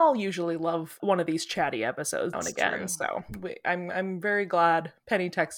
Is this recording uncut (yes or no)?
no